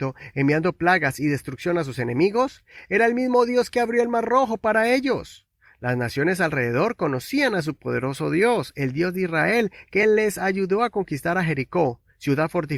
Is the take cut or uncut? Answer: uncut